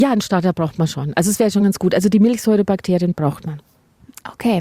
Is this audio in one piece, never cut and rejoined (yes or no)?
yes